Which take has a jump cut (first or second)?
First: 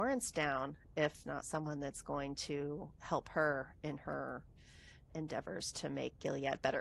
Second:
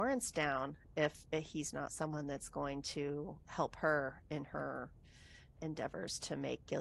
first